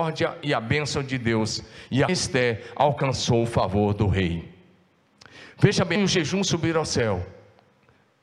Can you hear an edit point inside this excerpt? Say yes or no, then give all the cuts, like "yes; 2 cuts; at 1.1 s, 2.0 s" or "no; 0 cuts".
yes; 2 cuts; at 2.1 s, 6.0 s